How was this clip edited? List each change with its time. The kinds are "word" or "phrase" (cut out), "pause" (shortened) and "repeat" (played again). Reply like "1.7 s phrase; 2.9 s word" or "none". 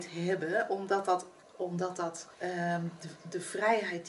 1.4 s pause; 2.3 s pause